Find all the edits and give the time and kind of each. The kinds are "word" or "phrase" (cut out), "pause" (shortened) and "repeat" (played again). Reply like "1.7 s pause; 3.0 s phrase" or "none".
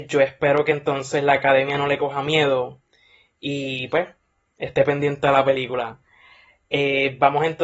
none